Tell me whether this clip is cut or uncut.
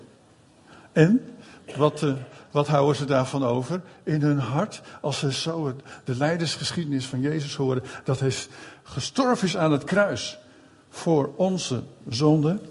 uncut